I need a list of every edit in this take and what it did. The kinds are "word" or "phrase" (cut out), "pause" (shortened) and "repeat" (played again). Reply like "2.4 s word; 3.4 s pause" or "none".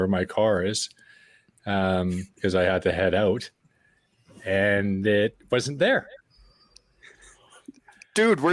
none